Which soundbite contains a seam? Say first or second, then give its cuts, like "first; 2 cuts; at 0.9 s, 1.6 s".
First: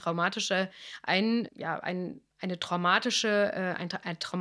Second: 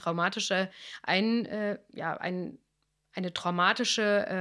first; 2 cuts; at 1.5 s, 2.3 s